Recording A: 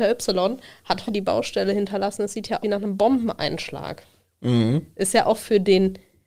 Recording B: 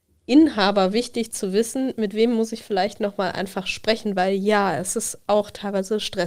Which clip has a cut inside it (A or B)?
A